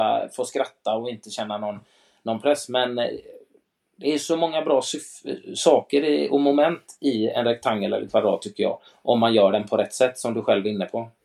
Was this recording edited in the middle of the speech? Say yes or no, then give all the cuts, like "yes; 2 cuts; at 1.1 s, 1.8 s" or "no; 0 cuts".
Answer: no; 0 cuts